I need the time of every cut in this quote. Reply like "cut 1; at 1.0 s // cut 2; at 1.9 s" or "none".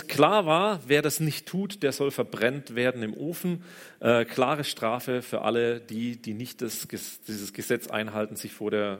none